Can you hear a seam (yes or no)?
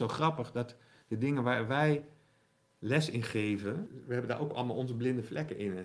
no